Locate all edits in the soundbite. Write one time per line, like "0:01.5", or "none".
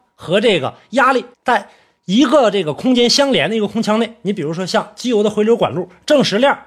0:01.3